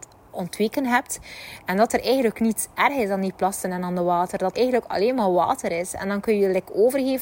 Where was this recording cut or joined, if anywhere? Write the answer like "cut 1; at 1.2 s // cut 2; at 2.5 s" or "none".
cut 1; at 4.5 s